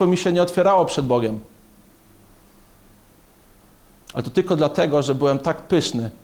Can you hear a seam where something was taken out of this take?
no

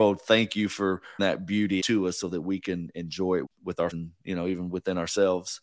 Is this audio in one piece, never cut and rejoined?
no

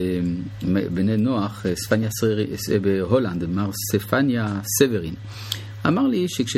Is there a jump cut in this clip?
no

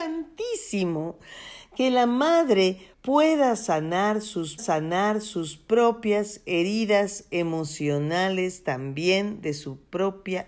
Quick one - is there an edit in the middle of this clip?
yes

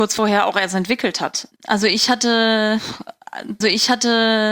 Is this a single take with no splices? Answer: no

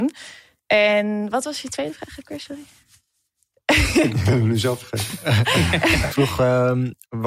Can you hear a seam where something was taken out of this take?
yes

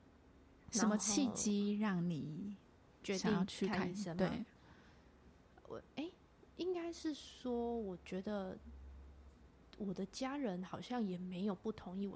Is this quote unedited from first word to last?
yes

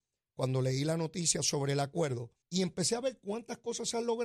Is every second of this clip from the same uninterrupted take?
no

